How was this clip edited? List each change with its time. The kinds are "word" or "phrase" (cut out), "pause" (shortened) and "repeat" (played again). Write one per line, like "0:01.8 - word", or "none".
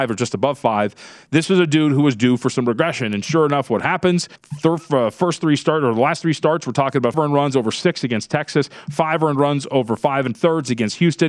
0:04.4 - pause
0:07.1 - word
0:10.3 - word